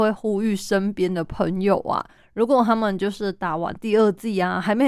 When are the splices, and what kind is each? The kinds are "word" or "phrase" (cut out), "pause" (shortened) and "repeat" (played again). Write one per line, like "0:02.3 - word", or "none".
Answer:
none